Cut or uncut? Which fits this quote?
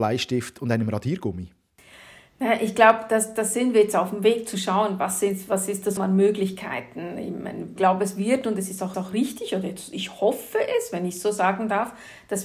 cut